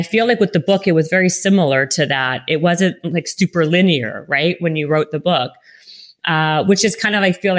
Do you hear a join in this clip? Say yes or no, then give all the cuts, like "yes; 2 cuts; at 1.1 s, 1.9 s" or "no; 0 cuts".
no; 0 cuts